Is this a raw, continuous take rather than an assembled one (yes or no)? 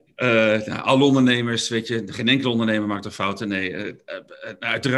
yes